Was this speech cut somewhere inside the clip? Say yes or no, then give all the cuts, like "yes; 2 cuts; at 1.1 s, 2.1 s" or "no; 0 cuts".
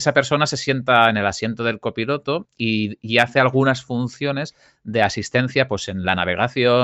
no; 0 cuts